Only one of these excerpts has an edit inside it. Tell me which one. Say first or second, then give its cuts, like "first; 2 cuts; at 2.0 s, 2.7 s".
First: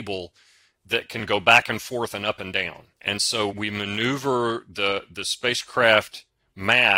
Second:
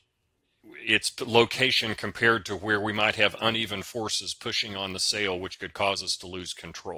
first; 2 cuts; at 2.9 s, 3.5 s